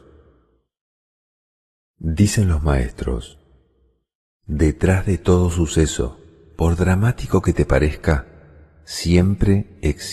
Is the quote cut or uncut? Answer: uncut